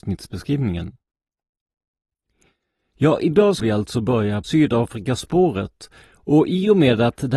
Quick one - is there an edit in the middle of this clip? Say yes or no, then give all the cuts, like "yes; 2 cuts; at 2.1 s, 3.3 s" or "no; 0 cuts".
yes; 2 cuts; at 3.6 s, 4.4 s